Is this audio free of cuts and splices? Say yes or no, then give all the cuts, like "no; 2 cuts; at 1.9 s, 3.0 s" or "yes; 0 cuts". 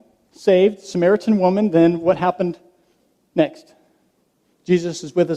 yes; 0 cuts